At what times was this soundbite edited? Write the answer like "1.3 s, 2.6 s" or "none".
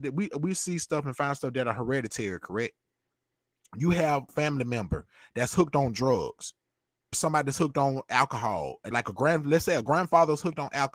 4.3 s, 7.1 s, 8.9 s